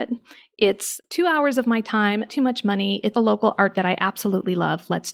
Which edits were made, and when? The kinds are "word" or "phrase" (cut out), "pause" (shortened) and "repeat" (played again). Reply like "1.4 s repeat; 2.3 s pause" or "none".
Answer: 2.3 s word; 3.1 s word; 3.7 s word